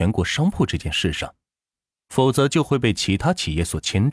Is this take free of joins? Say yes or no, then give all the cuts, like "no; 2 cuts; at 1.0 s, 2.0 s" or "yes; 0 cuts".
yes; 0 cuts